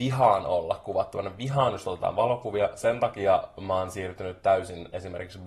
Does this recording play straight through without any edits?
no; 1 cut; at 1.8 s

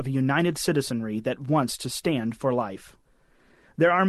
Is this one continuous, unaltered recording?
yes; 0 cuts

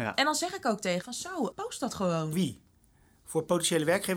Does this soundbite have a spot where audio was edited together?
yes; 3 cuts; at 1.0 s, 1.5 s, 2.3 s

